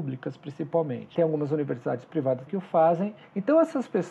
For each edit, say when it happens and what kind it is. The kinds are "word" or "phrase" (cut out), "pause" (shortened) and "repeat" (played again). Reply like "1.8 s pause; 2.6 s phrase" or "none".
2.5 s word